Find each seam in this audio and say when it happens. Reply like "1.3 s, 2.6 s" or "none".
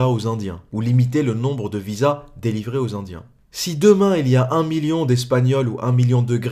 none